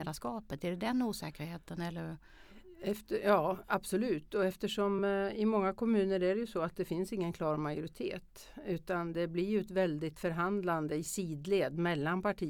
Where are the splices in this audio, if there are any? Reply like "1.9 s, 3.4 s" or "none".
none